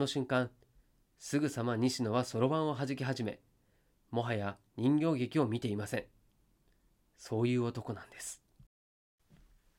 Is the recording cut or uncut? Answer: uncut